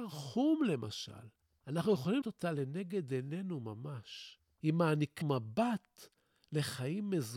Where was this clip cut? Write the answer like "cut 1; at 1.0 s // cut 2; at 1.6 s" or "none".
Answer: cut 1; at 2.2 s // cut 2; at 5.2 s